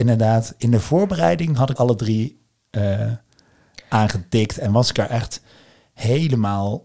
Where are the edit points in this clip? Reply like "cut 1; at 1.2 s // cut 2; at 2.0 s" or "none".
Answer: cut 1; at 1.8 s